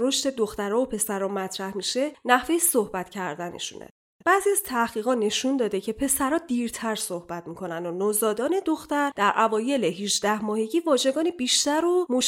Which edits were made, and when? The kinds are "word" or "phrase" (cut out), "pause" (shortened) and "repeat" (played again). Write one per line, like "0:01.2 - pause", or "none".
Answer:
none